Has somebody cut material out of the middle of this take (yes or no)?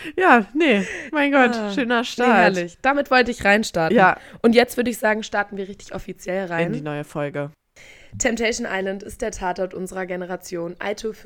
no